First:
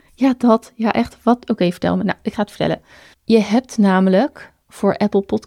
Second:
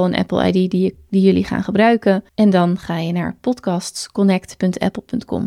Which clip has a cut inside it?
second; 1 cut; at 2.3 s

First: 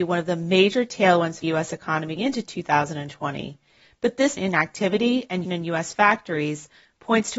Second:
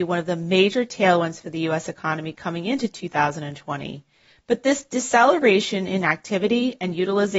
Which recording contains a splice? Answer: first; 4 cuts; at 1.4 s, 2.2 s, 4.4 s, 5.4 s

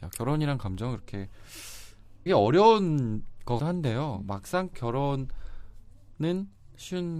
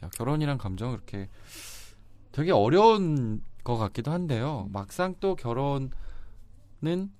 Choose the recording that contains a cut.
first; 3 cuts; at 2.3 s, 3.6 s, 4.7 s

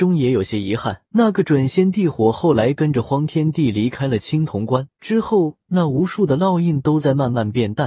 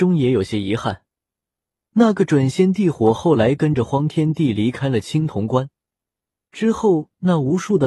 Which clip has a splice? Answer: first; 2 cuts; at 1.1 s, 4.9 s

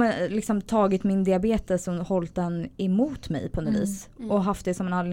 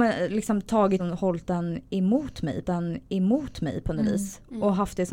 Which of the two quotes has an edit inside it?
second; 2 cuts; at 1.0 s, 2.6 s

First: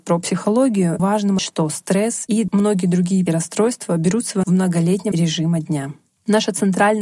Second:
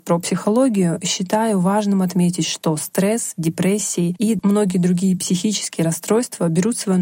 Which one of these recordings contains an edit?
first; 6 cuts; at 1.0 s, 1.4 s, 2.3 s, 3.3 s, 4.4 s, 5.1 s

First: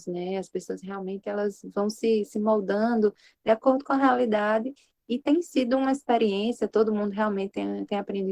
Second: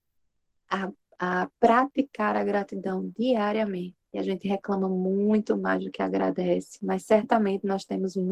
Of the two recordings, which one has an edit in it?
second; 1 cut; at 4.0 s

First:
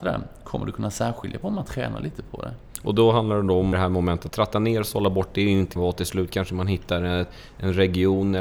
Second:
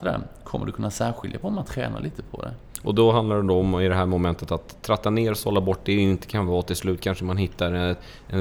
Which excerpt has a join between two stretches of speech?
first; 3 cuts; at 3.7 s, 4.3 s, 5.8 s

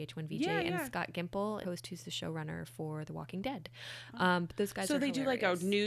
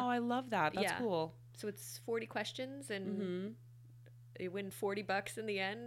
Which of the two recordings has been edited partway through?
first; 1 cut; at 1.6 s

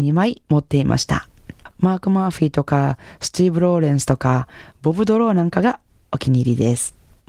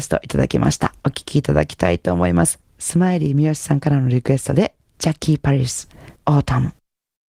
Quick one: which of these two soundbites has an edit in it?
second; 2 cuts; at 1.0 s, 6.2 s

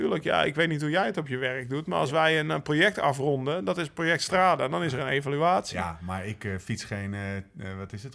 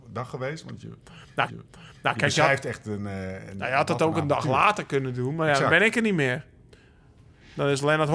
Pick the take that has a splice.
second; 1 cut; at 1.5 s

